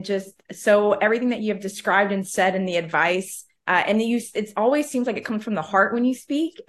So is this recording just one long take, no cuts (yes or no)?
no